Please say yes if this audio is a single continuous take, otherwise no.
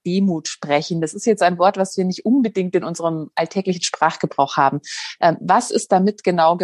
yes